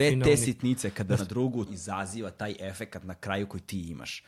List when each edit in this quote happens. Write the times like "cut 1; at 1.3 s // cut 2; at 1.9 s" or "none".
cut 1; at 1.2 s // cut 2; at 1.7 s